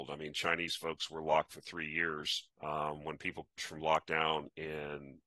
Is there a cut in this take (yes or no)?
yes